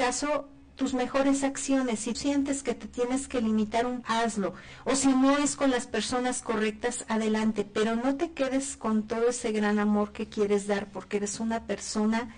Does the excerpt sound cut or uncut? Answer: cut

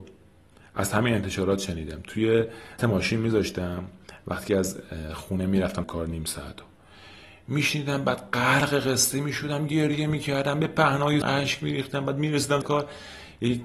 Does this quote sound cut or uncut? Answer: cut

